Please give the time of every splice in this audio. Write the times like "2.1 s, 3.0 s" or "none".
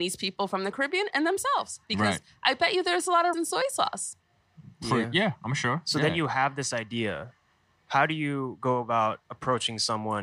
3.3 s